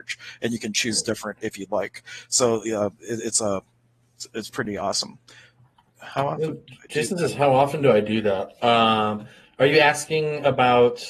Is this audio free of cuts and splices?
yes; 0 cuts

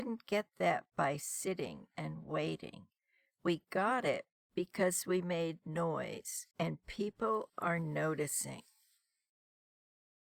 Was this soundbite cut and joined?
yes; 1 cut; at 6.5 s

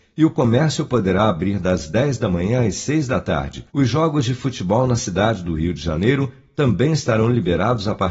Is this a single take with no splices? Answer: no; 1 cut; at 3.7 s

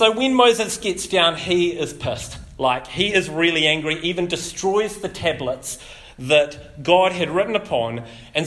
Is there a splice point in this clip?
no; 0 cuts

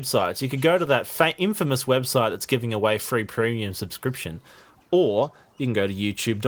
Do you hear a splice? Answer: no; 0 cuts

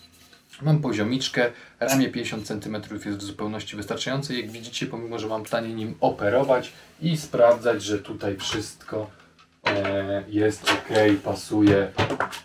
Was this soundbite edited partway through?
yes; 1 cut; at 5.5 s

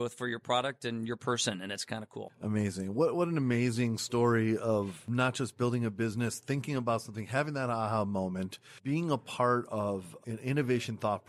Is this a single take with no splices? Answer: yes; 0 cuts

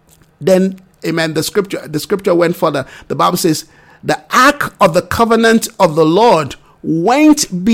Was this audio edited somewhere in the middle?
no; 0 cuts

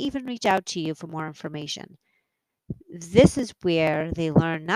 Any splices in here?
no; 0 cuts

